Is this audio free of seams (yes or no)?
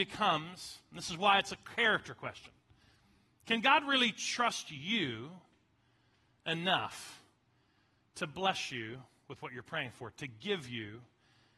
yes